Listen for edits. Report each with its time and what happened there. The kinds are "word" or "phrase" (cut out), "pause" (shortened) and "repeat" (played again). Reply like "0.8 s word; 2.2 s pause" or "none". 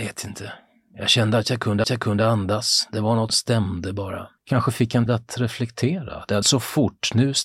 1.8 s repeat; 3.3 s word; 4.4 s pause; 5.1 s word; 6.4 s word